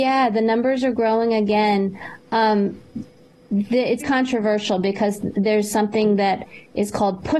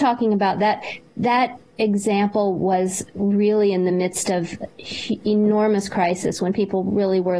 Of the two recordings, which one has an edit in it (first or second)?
first